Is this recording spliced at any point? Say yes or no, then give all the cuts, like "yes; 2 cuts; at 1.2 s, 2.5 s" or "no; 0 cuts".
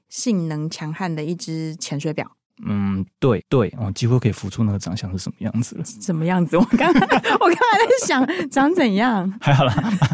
yes; 1 cut; at 3.4 s